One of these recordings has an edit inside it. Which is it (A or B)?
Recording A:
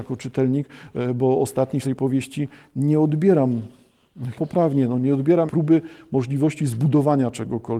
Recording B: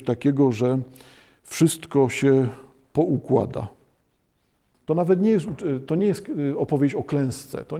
A